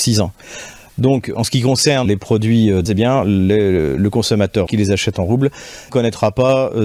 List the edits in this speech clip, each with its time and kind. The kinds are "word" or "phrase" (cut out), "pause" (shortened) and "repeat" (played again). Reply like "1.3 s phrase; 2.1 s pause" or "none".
2.1 s word; 2.9 s word; 4.7 s word; 5.9 s word